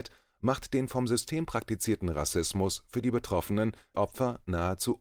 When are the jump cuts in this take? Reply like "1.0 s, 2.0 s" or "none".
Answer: 3.9 s